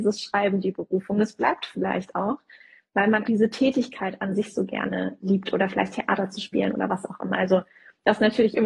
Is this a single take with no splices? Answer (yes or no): no